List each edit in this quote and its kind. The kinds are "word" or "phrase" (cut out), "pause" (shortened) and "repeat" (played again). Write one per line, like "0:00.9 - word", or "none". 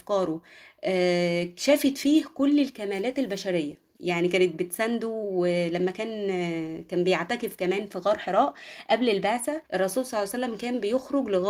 0:04.0 - pause
0:09.7 - pause